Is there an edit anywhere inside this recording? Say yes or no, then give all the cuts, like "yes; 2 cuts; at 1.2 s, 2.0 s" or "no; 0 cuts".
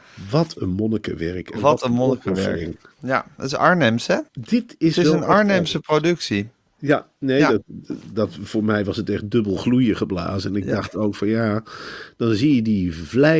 yes; 1 cut; at 4.3 s